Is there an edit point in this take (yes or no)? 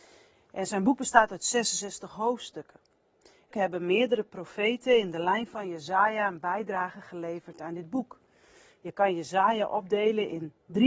yes